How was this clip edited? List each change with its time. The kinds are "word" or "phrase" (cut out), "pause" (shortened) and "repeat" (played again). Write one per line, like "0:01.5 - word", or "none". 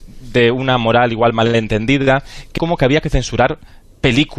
0:02.6 - word